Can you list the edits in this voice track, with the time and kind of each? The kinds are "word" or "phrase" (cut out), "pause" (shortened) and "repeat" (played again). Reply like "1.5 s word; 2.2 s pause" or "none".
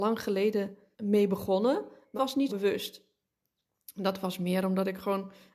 0.9 s word; 2.2 s word; 2.5 s word